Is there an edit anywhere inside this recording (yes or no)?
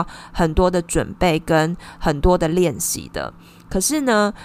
no